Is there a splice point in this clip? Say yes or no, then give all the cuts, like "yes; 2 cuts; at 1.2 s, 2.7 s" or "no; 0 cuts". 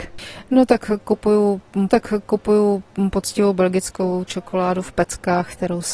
yes; 1 cut; at 1.9 s